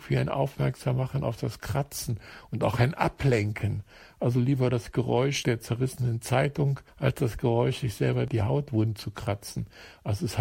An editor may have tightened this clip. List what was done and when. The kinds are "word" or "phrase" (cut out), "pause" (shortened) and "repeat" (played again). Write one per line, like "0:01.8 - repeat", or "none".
none